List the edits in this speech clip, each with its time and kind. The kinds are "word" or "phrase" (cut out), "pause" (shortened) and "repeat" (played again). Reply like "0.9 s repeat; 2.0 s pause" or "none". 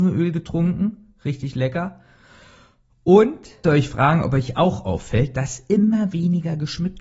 3.6 s word